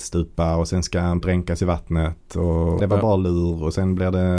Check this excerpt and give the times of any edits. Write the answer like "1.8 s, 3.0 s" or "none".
1.2 s, 2.8 s